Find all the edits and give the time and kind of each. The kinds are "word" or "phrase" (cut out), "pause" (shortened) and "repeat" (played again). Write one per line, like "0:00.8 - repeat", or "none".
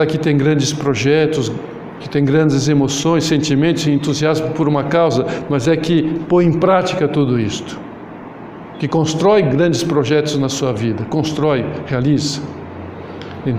none

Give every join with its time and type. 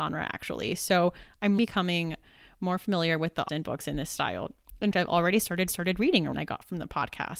0:01.6 - word
0:03.5 - word
0:04.9 - word
0:05.7 - repeat
0:06.3 - word

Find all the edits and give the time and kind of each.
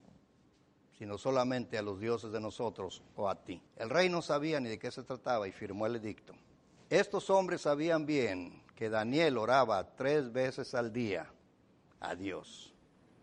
0:03.7 - pause
0:06.6 - pause

